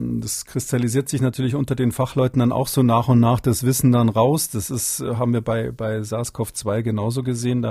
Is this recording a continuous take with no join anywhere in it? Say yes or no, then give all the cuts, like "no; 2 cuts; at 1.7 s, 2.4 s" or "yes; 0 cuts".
yes; 0 cuts